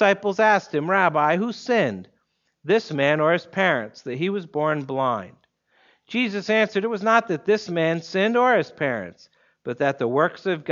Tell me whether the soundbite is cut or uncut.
uncut